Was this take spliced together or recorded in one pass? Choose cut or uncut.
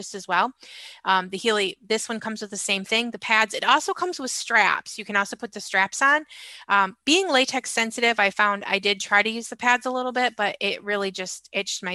uncut